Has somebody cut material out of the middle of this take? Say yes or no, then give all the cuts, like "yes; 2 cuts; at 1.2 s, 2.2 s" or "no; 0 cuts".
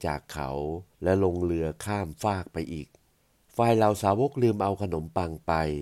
yes; 2 cuts; at 0.9 s, 3.1 s